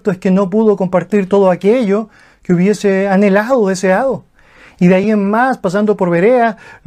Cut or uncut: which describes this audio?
uncut